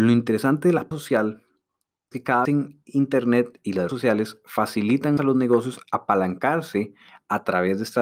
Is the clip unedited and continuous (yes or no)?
no